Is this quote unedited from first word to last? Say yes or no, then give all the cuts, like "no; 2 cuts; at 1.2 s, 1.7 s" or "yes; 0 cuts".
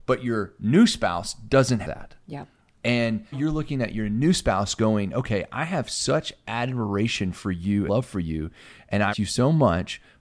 no; 4 cuts; at 1.8 s, 3.3 s, 7.9 s, 9.1 s